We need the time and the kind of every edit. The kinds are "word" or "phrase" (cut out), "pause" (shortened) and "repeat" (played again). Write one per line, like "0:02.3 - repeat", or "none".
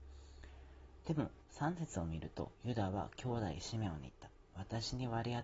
0:02.5 - pause